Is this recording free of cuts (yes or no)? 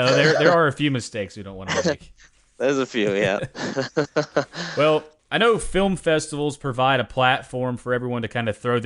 no